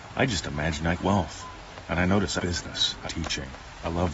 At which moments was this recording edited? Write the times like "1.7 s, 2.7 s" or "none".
1.0 s, 2.4 s, 3.0 s